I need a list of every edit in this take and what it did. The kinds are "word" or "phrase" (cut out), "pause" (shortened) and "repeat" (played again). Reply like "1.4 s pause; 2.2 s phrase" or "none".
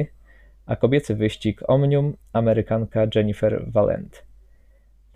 none